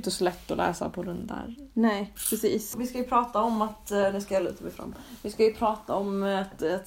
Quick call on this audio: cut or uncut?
uncut